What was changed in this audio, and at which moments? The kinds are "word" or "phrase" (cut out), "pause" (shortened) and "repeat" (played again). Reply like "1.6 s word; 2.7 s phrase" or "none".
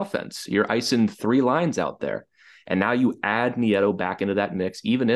none

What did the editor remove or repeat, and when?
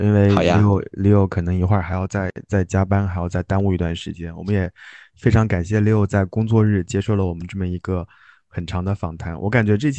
none

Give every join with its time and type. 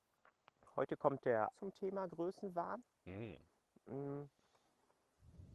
1.5 s word

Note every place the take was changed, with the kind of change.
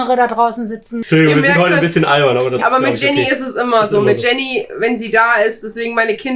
2.6 s word

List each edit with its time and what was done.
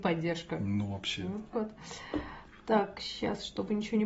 1.5 s word

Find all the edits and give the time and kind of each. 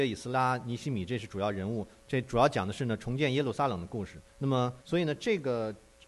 4.3 s pause; 4.8 s pause

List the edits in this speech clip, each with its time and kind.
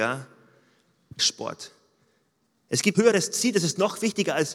1.2 s word; 2.9 s word

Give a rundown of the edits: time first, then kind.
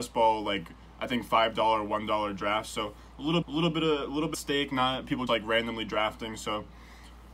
3.4 s repeat; 4.3 s word; 5.3 s word

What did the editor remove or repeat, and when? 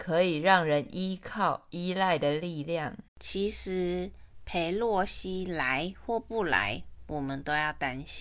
3.1 s pause

